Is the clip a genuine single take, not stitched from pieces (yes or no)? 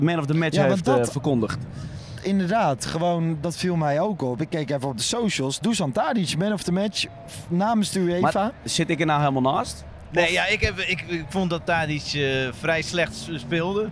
yes